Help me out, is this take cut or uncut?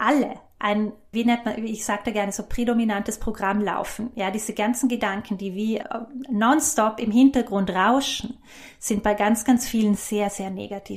cut